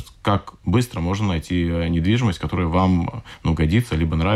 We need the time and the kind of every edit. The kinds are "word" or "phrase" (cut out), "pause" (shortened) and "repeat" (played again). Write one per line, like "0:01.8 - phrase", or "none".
none